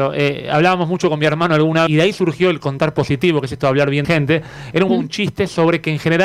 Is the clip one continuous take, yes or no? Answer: no